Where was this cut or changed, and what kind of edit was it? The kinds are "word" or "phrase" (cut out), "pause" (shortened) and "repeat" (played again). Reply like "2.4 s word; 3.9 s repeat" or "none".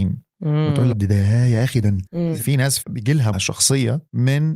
0.9 s word; 2.1 s word; 2.8 s word; 3.3 s word